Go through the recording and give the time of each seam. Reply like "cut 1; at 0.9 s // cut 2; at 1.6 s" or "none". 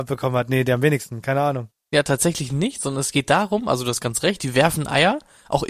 none